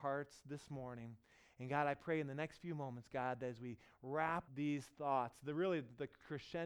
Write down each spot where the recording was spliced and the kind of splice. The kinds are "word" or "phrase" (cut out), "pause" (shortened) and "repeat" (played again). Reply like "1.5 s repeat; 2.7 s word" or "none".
4.5 s word

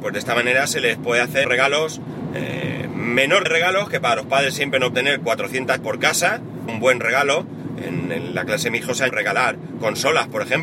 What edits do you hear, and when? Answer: 1.4 s phrase; 3.5 s word; 4.9 s phrase; 5.8 s word; 6.7 s word; 9.1 s word

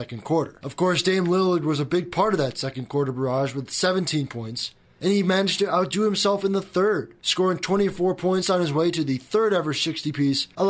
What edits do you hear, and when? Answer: none

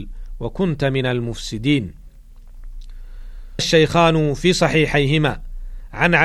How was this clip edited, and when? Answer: 3.6 s word

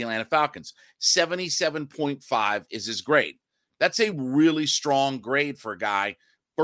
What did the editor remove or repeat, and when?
none

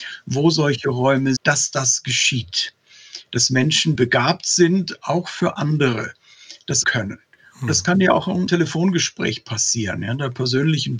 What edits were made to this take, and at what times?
1.4 s word; 4.0 s word; 6.8 s word; 8.5 s word

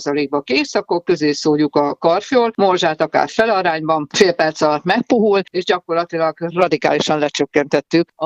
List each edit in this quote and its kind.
none

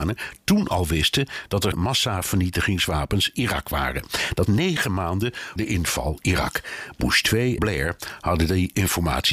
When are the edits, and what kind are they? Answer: 1.7 s word; 3.3 s word; 4.5 s word; 5.6 s word; 6.2 s word; 7.6 s word

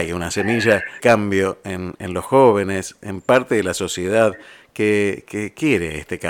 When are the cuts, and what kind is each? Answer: 1.0 s word

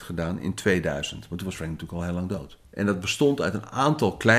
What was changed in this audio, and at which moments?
2.6 s pause

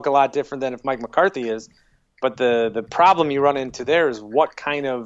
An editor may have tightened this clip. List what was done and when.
none

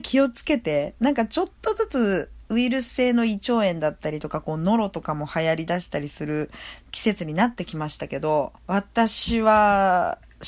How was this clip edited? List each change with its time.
8.6 s pause

